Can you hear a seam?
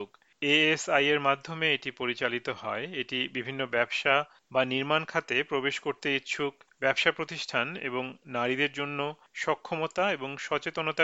no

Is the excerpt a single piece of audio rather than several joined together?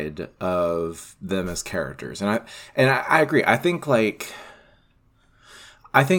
yes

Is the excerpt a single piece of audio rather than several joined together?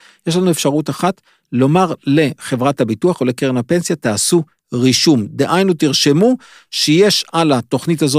yes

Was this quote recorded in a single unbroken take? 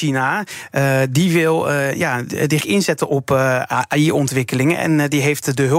no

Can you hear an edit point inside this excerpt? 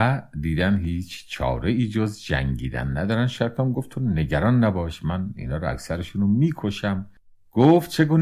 no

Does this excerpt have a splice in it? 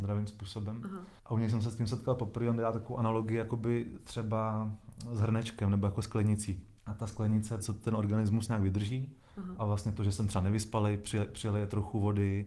yes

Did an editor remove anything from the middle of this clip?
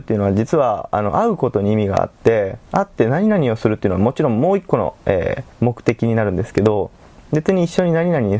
yes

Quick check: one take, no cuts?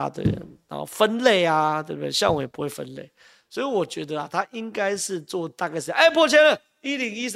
yes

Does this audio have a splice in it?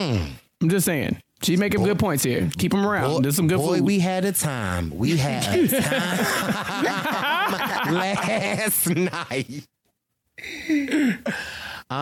yes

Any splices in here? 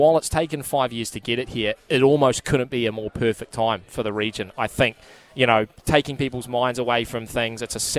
no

